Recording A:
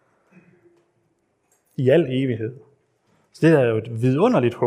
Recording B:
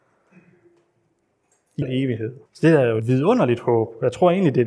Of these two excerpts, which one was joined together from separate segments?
B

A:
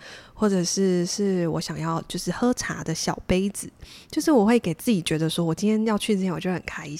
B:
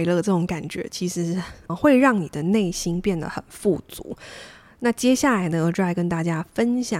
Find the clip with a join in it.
B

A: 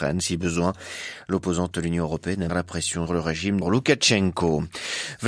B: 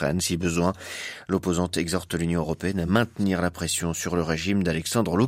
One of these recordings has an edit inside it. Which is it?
A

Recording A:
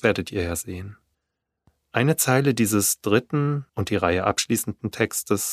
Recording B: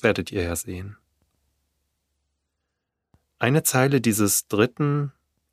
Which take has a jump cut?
A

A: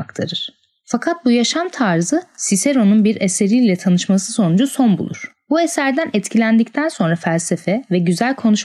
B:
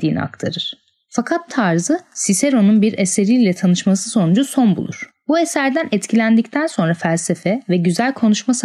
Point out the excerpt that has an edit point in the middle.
B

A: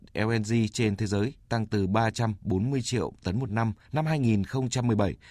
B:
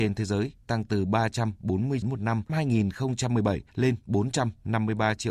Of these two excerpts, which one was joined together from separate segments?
B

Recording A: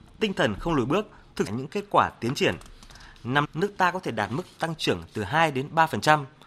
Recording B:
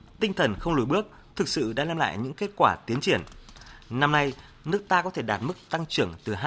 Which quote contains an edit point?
A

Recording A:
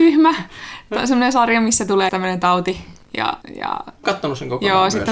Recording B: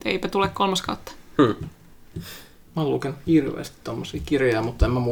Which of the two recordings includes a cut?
A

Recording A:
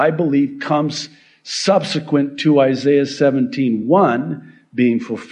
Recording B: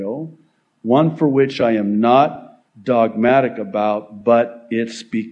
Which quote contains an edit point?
B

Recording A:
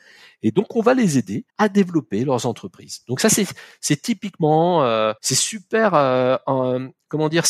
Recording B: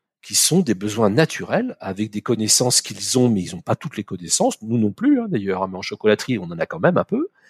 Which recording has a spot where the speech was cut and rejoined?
A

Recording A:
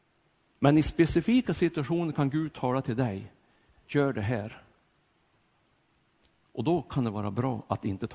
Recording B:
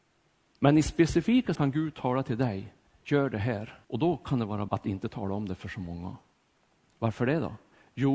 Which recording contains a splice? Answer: B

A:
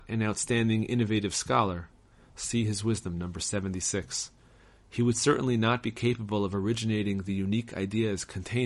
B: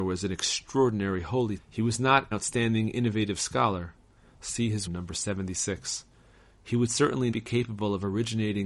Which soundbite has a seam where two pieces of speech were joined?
B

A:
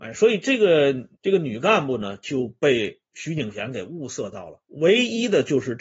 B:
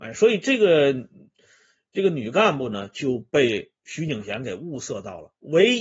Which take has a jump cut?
A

